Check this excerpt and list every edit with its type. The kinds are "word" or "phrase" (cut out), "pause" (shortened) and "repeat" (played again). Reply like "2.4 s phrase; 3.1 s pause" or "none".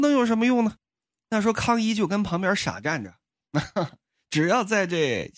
none